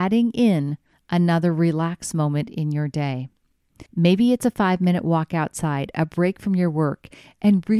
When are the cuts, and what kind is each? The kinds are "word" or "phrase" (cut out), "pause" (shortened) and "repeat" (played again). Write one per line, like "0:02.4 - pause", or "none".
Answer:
0:00.9 - pause
0:03.9 - pause